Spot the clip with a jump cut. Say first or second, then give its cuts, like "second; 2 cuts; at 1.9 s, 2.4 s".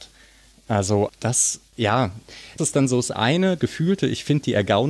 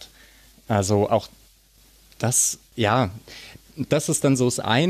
first; 3 cuts; at 1.1 s, 2.6 s, 3.6 s